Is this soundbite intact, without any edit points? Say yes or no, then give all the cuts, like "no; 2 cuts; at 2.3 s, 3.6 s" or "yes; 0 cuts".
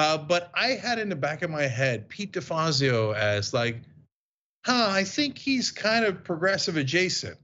yes; 0 cuts